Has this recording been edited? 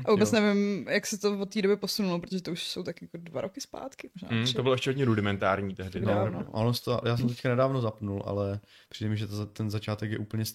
no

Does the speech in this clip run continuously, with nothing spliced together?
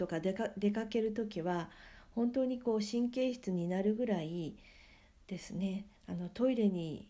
no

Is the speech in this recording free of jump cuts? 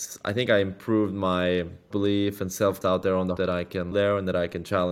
no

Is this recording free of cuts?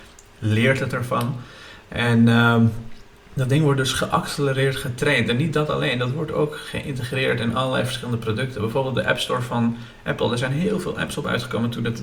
yes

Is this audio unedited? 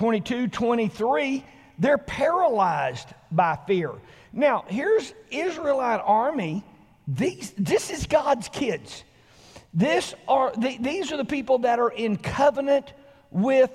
yes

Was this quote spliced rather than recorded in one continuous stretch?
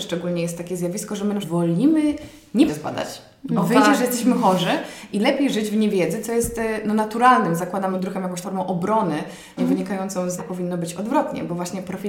yes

